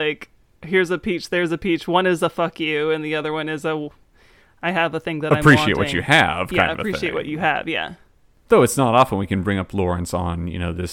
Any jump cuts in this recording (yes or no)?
no